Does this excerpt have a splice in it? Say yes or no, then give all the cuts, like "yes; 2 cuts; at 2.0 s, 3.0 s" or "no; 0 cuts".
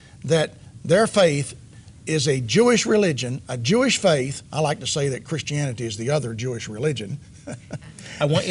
yes; 1 cut; at 4.5 s